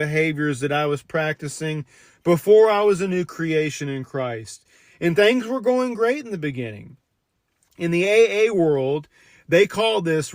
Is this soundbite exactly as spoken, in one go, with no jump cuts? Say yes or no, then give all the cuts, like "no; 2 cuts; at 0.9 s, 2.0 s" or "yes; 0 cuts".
yes; 0 cuts